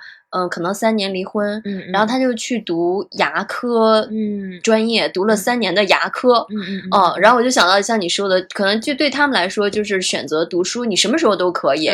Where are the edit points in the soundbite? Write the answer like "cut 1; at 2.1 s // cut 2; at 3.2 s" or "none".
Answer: none